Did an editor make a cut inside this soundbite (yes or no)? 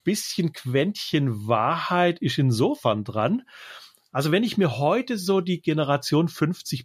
no